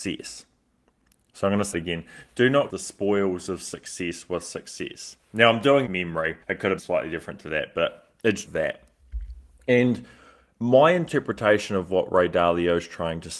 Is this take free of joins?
no; 6 cuts; at 1.7 s, 2.7 s, 5.9 s, 6.4 s, 6.8 s, 8.5 s

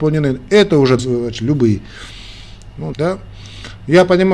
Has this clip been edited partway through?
yes; 2 cuts; at 1.0 s, 2.9 s

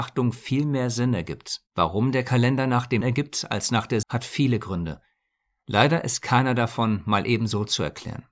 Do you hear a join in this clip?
yes; 3 cuts; at 1.7 s, 3.0 s, 4.0 s

